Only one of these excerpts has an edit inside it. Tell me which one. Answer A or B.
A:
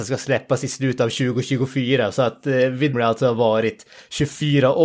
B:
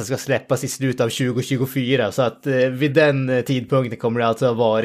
A